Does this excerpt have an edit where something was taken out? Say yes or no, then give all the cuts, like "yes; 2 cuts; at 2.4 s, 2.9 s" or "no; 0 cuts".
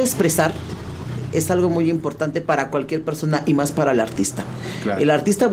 no; 0 cuts